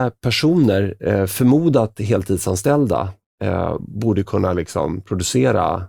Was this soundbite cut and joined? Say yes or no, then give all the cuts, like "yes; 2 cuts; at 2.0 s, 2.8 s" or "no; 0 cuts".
no; 0 cuts